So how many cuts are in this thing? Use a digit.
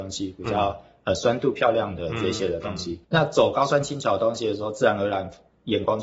1